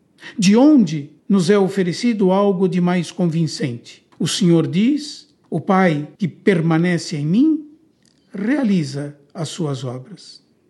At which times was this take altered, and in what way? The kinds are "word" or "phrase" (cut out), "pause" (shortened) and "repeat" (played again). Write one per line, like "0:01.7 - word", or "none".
0:01.2 - pause
0:04.1 - pause
0:05.4 - pause
0:06.2 - pause